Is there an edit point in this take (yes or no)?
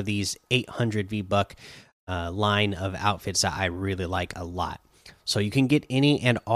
no